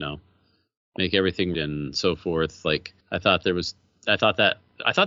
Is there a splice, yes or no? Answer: yes